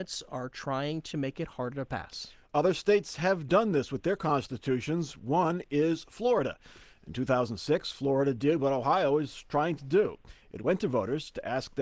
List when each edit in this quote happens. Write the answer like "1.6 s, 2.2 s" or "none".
none